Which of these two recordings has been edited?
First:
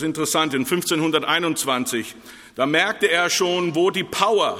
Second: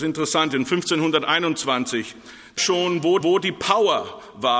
second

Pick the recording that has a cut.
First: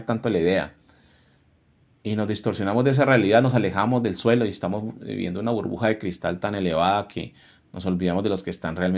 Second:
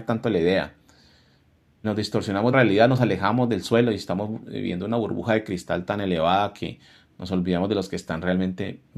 second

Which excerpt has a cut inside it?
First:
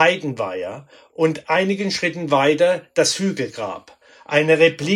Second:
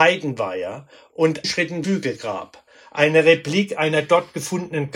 second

